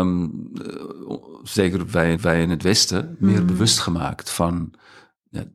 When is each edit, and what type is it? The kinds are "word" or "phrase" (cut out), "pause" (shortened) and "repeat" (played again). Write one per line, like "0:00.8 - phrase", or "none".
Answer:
0:02.2 - repeat